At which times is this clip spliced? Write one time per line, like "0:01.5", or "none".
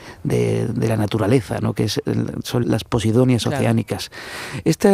0:02.6